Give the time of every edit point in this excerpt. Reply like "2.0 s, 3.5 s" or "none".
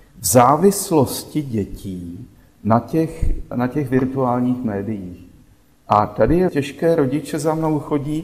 3.5 s, 6.5 s